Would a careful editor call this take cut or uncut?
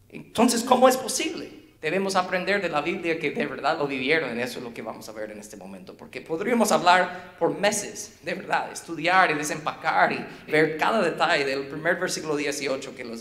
cut